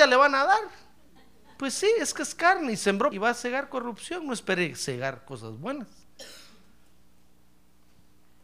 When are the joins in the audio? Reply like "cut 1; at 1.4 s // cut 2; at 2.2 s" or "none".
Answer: cut 1; at 3.1 s